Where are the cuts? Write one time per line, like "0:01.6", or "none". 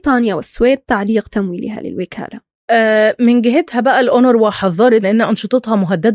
0:05.0